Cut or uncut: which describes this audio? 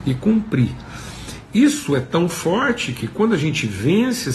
uncut